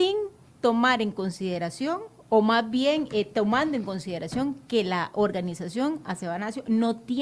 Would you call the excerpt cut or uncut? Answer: uncut